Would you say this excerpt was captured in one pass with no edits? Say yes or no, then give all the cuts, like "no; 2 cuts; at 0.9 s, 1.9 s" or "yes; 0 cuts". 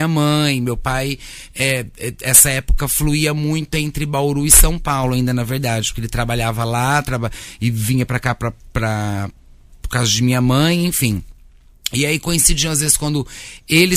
yes; 0 cuts